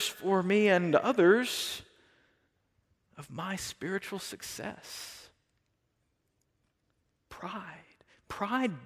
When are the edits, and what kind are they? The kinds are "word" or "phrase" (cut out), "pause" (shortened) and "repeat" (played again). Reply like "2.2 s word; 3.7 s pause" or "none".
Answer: none